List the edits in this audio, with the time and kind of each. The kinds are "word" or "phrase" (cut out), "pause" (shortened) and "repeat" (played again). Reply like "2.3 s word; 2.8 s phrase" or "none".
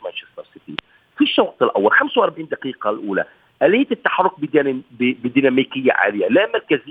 none